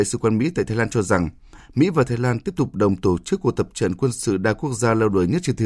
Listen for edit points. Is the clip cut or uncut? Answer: uncut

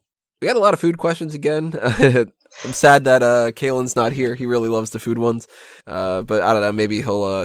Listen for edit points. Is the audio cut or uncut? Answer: cut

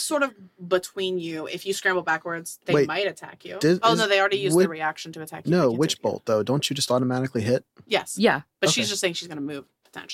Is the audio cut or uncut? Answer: uncut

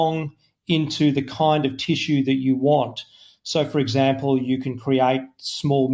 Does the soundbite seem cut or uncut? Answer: uncut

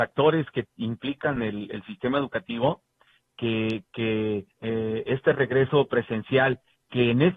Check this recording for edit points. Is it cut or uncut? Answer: cut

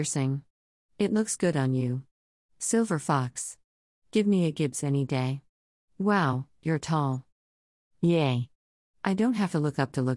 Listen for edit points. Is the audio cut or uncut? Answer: uncut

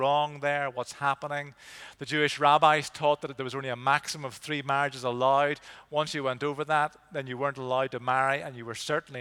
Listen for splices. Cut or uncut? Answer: uncut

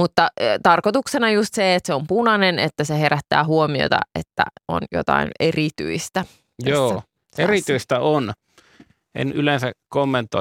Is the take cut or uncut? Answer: uncut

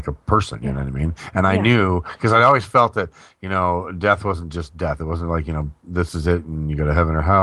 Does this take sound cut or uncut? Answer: uncut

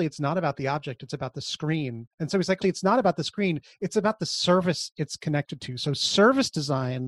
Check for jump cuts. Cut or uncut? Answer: cut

